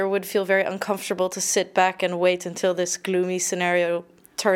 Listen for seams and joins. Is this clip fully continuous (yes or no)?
yes